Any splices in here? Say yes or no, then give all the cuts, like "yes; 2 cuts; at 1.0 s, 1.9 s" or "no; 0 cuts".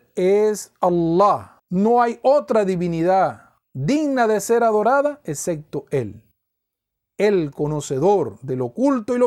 yes; 2 cuts; at 1.6 s, 3.6 s